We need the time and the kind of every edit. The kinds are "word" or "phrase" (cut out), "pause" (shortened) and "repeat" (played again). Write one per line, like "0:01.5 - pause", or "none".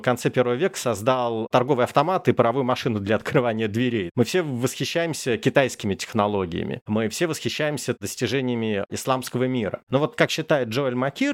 none